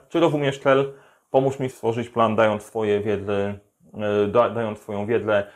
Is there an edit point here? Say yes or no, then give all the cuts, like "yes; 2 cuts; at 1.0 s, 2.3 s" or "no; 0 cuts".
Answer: yes; 1 cut; at 1.7 s